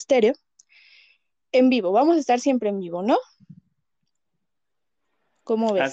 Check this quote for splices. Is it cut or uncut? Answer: uncut